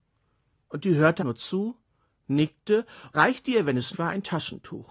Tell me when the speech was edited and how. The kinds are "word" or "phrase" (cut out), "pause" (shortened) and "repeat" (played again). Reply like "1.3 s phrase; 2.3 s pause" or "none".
1.2 s word; 3.1 s word; 3.9 s word